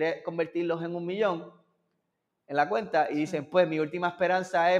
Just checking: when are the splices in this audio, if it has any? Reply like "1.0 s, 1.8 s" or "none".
none